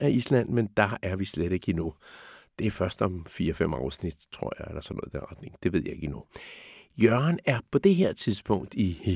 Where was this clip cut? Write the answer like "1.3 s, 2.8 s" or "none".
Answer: none